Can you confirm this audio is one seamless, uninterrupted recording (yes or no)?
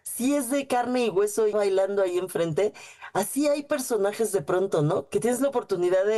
no